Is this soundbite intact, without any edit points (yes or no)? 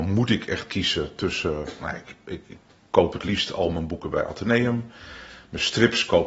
yes